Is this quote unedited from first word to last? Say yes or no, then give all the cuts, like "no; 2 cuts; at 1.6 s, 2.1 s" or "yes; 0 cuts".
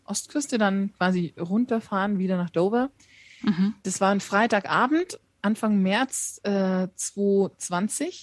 no; 1 cut; at 3.8 s